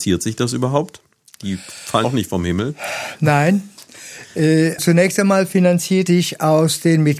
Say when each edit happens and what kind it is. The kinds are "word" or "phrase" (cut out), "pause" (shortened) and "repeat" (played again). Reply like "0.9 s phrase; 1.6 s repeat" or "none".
2.0 s word; 4.8 s word; 6.1 s word

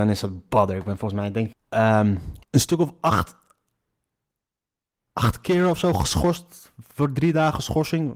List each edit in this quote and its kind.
1.5 s word; 2.4 s pause

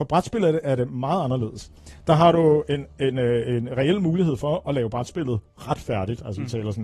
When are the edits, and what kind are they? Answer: none

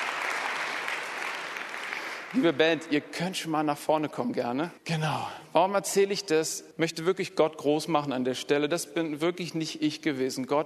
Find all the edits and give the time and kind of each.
4.8 s pause; 6.7 s pause

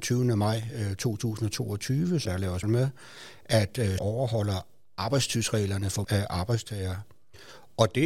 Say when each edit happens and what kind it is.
2.2 s word; 2.6 s word; 4.0 s word; 6.0 s word

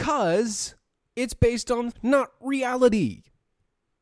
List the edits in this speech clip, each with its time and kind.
1.9 s word

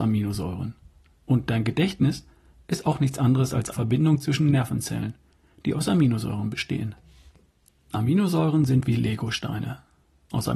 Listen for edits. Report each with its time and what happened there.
3.7 s word

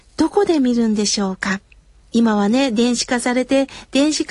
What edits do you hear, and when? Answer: 2.0 s pause

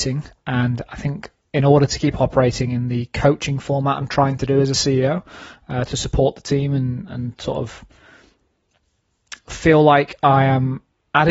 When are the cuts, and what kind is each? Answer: none

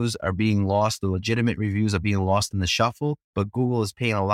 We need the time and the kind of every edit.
3.2 s pause

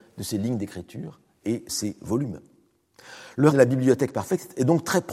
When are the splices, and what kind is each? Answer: 1.7 s word; 3.5 s word

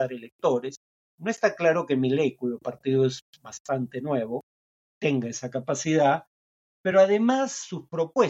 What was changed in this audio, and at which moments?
none

